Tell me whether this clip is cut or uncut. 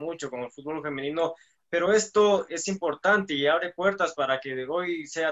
uncut